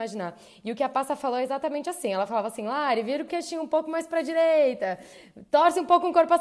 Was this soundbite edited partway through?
no; 0 cuts

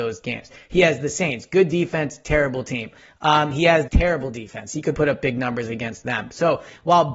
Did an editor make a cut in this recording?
yes; 2 cuts; at 3.9 s, 4.9 s

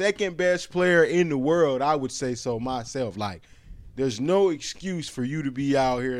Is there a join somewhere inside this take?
no; 0 cuts

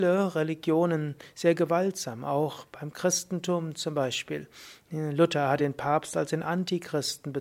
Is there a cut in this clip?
no; 0 cuts

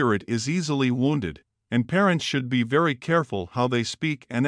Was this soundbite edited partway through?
no; 0 cuts

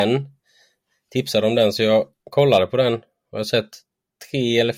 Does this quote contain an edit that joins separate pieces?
no; 0 cuts

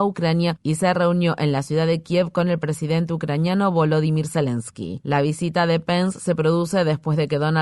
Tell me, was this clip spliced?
no; 0 cuts

